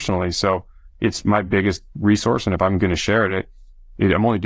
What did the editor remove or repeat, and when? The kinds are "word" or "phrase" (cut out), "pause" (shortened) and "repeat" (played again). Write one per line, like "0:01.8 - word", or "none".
none